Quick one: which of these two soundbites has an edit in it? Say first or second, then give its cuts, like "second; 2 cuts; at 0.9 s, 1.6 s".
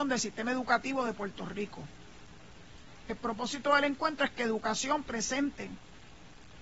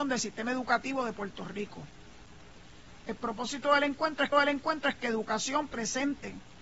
second; 1 cut; at 4.3 s